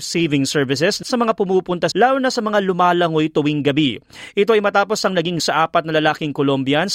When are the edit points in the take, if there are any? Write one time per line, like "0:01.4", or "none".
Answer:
0:01.0
0:01.9
0:05.4